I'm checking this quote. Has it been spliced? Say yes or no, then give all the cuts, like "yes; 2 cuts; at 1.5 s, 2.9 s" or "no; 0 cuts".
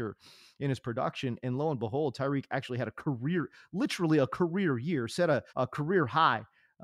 yes; 1 cut; at 5.5 s